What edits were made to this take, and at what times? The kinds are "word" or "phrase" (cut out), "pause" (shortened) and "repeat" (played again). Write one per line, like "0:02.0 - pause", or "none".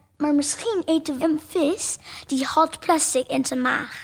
0:01.2 - word